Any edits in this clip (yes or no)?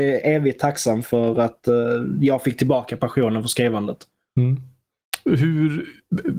no